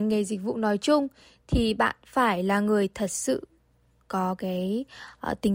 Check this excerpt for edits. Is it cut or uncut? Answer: uncut